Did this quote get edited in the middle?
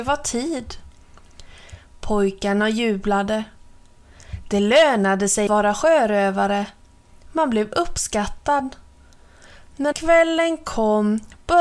yes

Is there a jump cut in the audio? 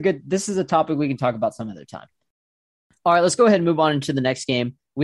no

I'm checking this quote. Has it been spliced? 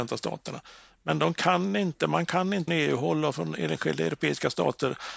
yes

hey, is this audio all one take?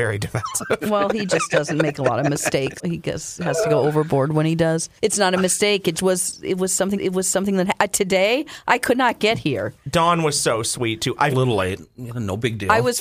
no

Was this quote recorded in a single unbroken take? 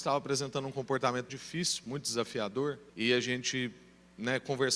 no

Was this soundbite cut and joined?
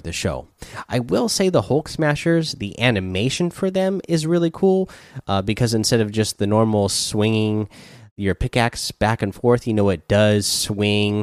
no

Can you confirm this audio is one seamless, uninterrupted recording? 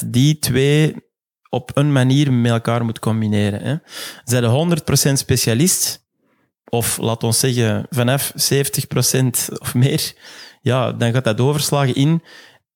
yes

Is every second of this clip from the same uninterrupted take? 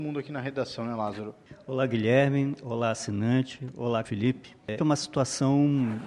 no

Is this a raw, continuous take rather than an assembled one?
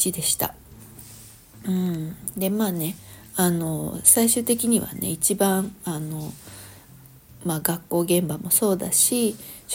yes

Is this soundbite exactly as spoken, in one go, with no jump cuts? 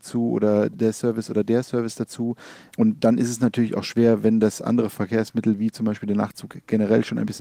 yes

